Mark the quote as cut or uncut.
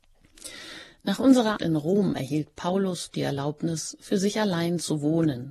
cut